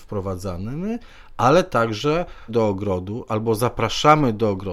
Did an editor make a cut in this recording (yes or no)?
yes